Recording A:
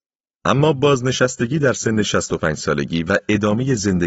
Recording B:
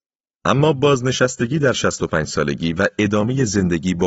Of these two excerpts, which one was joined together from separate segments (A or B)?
B